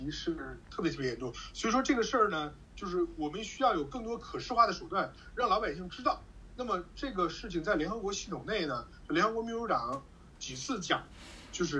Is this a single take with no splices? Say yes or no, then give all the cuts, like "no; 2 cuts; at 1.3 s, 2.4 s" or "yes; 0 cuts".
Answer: yes; 0 cuts